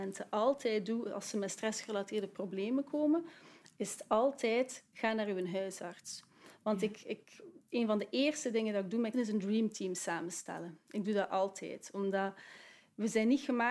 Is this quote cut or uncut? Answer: cut